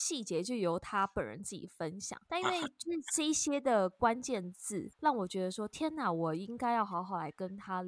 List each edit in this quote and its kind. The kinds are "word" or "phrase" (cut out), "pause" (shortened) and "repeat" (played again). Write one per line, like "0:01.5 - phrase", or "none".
0:02.3 - pause
0:04.9 - pause